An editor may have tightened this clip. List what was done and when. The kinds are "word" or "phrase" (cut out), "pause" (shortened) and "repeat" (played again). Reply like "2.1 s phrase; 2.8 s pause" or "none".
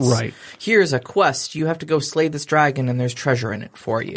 none